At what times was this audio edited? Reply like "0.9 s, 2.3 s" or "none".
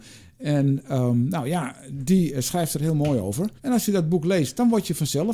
3.6 s